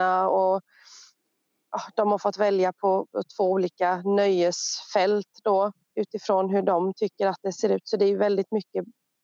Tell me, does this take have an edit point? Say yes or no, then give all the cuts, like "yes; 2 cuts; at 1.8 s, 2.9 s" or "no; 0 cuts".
yes; 1 cut; at 5.8 s